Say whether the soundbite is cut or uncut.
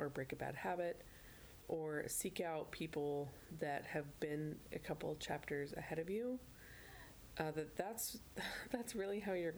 uncut